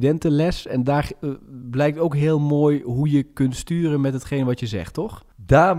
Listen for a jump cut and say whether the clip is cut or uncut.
uncut